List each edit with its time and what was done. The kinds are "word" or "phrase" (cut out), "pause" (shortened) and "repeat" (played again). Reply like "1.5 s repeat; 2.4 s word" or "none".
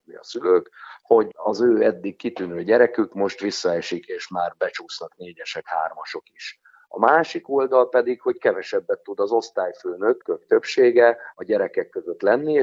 none